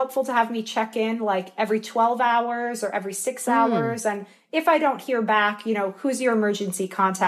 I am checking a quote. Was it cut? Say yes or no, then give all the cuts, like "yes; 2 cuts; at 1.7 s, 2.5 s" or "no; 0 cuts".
no; 0 cuts